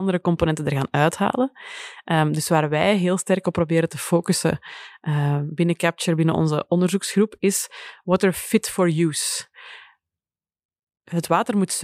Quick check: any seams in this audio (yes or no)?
no